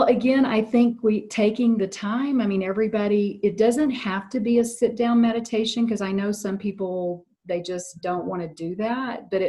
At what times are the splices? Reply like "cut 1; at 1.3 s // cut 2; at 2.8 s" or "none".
none